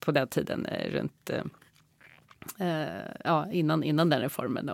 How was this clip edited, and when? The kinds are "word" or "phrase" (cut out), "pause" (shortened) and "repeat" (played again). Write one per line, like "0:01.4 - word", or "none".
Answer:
none